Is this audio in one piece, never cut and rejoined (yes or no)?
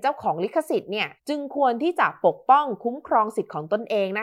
no